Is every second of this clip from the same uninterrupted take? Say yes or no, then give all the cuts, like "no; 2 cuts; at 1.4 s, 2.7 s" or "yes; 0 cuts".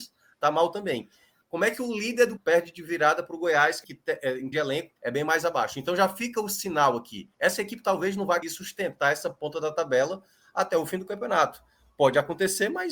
no; 6 cuts; at 2.4 s, 3.8 s, 4.5 s, 5.0 s, 7.3 s, 8.4 s